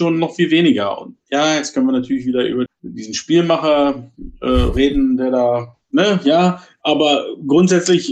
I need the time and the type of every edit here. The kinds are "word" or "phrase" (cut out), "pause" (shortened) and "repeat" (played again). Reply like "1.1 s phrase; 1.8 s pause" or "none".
2.7 s word